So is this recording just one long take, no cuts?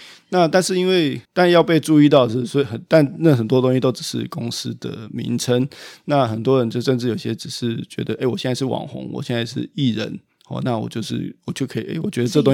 no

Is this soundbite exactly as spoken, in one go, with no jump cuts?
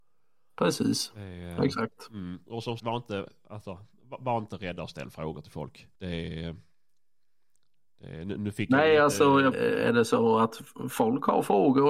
no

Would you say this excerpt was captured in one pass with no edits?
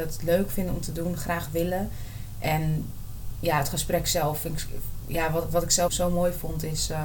no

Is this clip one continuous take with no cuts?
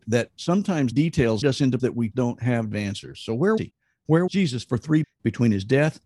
no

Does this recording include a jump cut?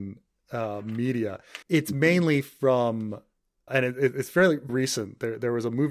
yes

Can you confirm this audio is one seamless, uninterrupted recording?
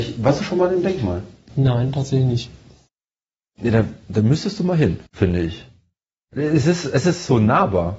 no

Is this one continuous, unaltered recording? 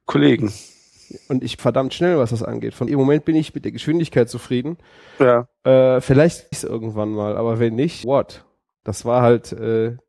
no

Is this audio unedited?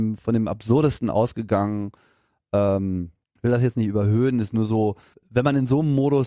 no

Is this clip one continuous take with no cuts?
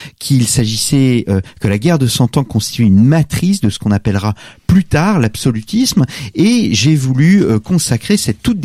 yes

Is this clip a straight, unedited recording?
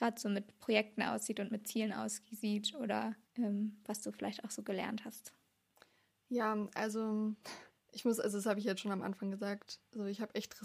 no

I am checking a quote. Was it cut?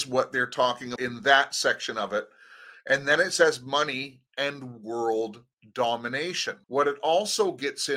yes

